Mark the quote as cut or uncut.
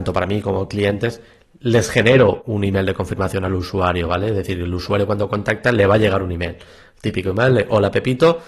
uncut